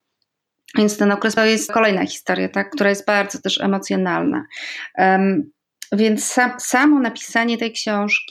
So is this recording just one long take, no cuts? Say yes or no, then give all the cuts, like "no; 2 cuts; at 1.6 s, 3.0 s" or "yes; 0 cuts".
no; 2 cuts; at 1.4 s, 1.7 s